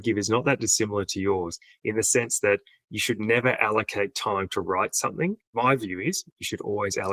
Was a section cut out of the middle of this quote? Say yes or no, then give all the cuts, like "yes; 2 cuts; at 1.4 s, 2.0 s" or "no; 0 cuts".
no; 0 cuts